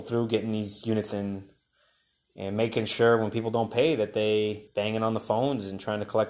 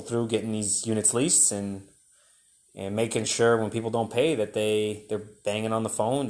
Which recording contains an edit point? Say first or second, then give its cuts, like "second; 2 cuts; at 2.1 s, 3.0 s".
first; 2 cuts; at 1.1 s, 4.7 s